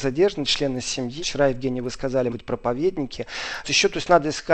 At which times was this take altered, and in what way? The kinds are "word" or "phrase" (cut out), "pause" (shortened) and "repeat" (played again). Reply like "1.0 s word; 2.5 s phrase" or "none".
1.2 s word; 2.3 s word; 3.6 s word

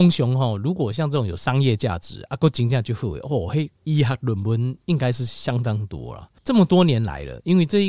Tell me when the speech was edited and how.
3.7 s pause; 6.4 s pause

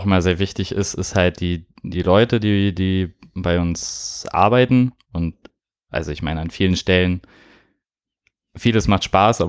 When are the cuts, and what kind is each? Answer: none

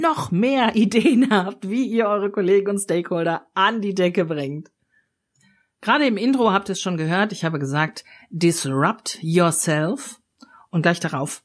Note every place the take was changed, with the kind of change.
none

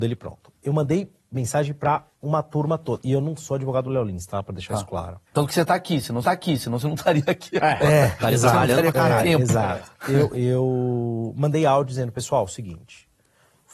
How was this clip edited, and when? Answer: 2.1 s pause; 5.3 s pause; 6.2 s repeat

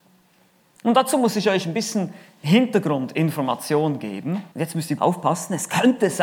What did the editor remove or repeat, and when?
4.5 s pause; 5.0 s word

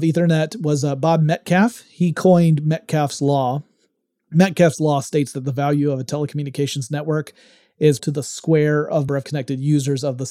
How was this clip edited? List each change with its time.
8.0 s word; 9.1 s word

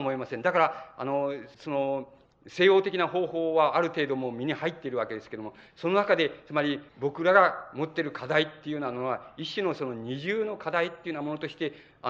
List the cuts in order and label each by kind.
1.5 s pause; 6.9 s pause

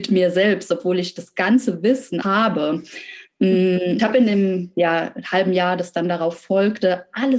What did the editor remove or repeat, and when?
2.2 s word; 4.0 s word

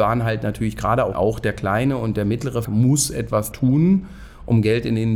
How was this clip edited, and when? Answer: 1.1 s phrase; 2.6 s word; 3.5 s word

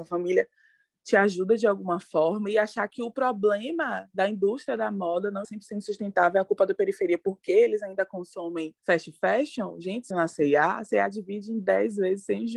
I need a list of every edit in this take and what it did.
5.4 s word; 8.8 s pause; 10.1 s word

